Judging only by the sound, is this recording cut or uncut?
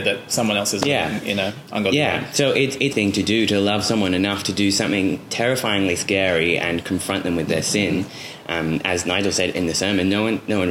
cut